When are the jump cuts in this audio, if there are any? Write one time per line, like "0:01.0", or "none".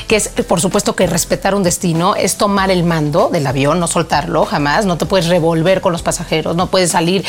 none

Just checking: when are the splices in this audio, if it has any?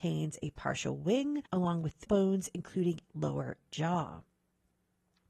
0:01.5
0:02.1
0:03.0

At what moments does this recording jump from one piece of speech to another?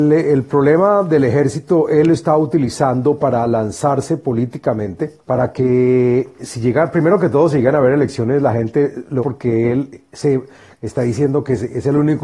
0:05.2
0:09.2

